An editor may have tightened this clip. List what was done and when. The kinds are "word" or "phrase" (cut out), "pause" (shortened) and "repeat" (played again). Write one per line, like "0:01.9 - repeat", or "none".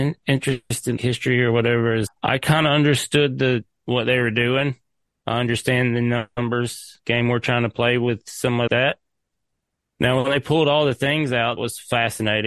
0:01.0 - word
0:02.1 - word
0:08.7 - word
0:11.6 - word

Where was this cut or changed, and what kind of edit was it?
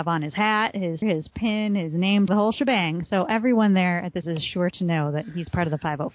0:01.0 - word
0:02.3 - word
0:04.2 - word

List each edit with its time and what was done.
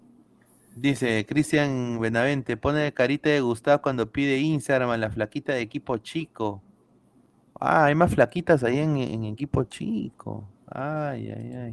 none

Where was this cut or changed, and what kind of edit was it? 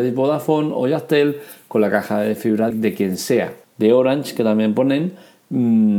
0:02.7 - word
0:03.6 - pause

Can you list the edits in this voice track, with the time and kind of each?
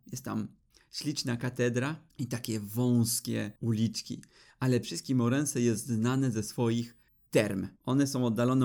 0:02.1 - pause
0:03.6 - pause
0:04.8 - word
0:07.8 - pause

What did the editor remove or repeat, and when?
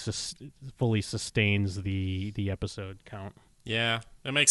none

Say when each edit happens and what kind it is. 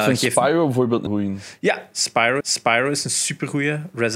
0:01.1 - word
0:02.4 - repeat

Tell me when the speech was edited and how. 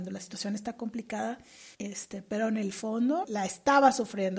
0:01.7 - pause
0:03.2 - word

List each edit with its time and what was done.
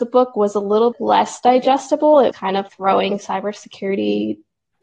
0:00.9 - word
0:02.3 - word
0:02.7 - word

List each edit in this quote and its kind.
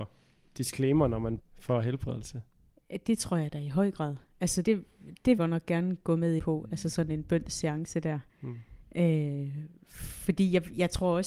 0:01.4 - word
0:04.6 - word
0:05.4 - phrase
0:06.4 - word
0:08.3 - pause

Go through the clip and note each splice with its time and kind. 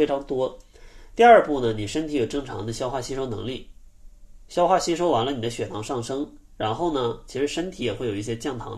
none

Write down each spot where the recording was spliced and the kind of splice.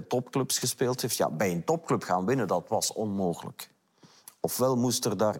none

